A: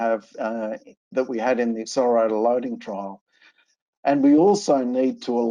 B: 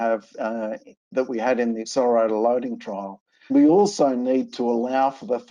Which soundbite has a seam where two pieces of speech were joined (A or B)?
B